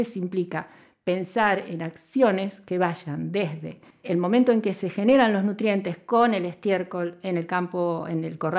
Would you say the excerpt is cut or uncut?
cut